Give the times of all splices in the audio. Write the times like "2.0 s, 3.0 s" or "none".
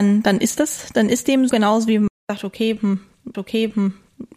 1.5 s, 2.2 s, 3.3 s